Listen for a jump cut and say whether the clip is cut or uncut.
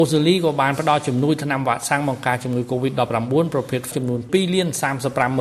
cut